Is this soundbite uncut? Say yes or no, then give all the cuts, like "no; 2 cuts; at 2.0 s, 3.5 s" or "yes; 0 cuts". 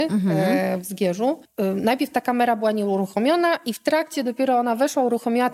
yes; 0 cuts